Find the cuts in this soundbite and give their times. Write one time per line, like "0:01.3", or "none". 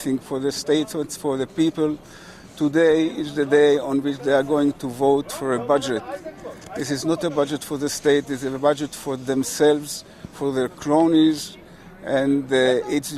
none